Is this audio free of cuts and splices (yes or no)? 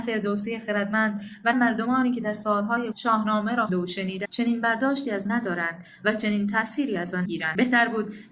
no